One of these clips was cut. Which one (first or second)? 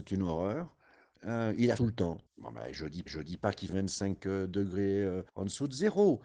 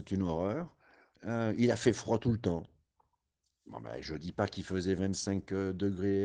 first